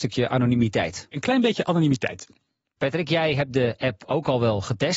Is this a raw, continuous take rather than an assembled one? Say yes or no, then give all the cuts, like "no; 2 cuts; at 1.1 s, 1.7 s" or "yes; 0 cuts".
yes; 0 cuts